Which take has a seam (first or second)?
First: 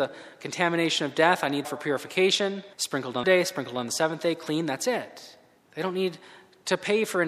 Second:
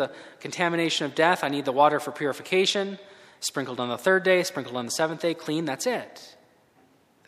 first